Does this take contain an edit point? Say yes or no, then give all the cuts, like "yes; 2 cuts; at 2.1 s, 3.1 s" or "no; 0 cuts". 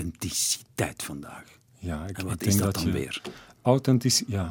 no; 0 cuts